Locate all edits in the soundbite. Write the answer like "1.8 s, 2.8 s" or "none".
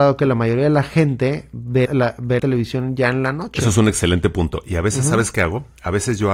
1.9 s, 2.4 s